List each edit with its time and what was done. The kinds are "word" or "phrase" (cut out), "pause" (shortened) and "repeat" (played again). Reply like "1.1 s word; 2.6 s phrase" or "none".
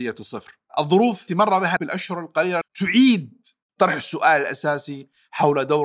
1.3 s word; 1.8 s word; 2.6 s word